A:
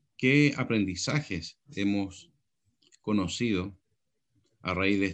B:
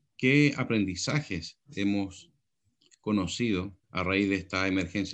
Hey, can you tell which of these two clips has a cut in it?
B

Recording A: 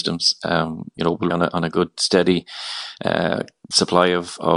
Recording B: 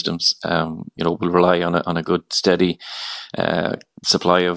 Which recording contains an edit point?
A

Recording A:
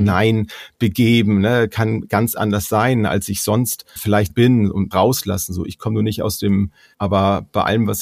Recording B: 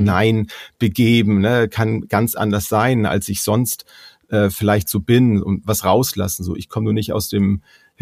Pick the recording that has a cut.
A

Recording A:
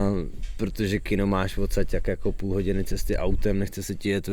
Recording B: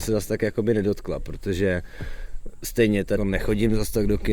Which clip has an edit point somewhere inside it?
B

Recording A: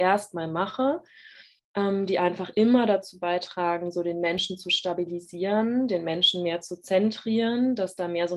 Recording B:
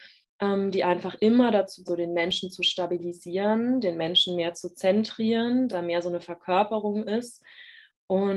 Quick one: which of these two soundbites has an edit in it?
B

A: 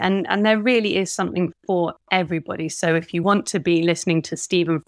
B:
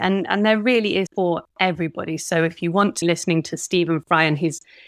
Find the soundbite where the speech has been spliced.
B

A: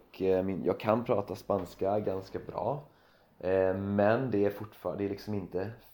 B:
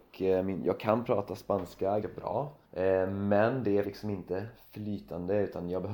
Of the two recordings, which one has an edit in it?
B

